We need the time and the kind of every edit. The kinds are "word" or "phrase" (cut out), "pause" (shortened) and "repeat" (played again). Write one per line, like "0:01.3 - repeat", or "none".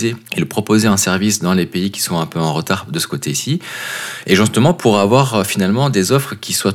none